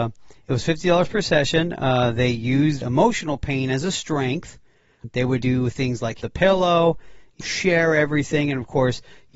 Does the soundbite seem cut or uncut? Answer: cut